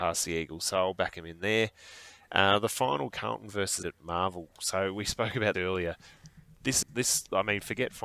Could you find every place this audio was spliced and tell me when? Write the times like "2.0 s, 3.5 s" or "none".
3.1 s, 3.8 s, 5.5 s, 6.8 s